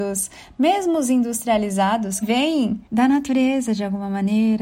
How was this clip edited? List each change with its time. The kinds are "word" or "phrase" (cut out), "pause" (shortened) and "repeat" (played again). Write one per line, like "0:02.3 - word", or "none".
0:02.2 - word
0:02.9 - pause